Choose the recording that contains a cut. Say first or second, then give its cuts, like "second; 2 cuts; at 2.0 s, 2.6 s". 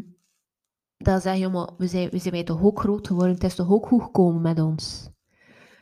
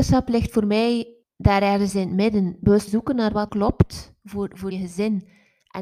second; 4 cuts; at 1.2 s, 2.9 s, 3.5 s, 4.7 s